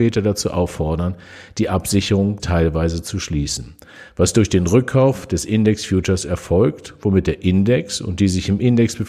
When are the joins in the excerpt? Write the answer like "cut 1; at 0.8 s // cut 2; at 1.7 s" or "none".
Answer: cut 1; at 2.4 s